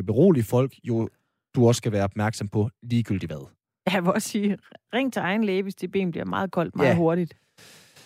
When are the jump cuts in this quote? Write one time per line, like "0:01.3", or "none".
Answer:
none

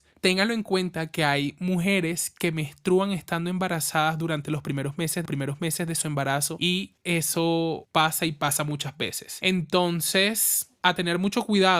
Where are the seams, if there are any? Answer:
0:05.2

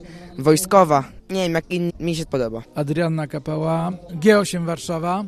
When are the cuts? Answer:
0:01.9
0:02.3

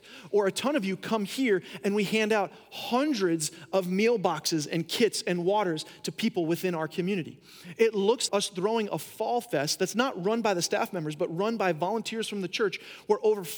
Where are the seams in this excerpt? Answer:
0:08.3

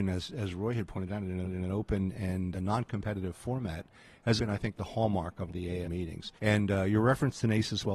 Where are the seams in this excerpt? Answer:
0:01.4
0:02.5
0:04.4
0:05.5
0:05.8
0:06.4

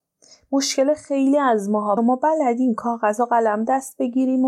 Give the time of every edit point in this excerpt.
0:02.0

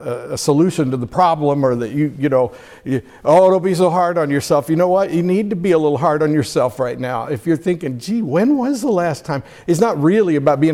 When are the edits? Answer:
none

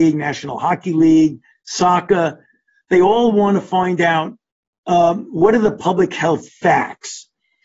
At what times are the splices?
none

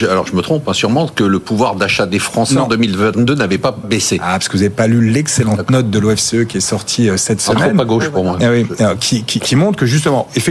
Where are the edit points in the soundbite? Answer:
0:03.8

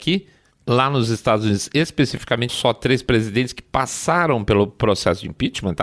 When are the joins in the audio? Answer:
0:02.5

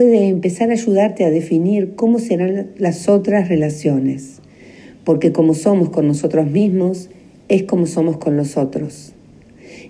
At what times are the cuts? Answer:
none

